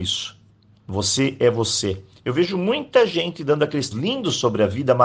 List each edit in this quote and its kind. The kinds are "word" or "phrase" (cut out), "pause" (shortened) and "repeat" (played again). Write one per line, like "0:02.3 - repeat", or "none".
0:03.9 - word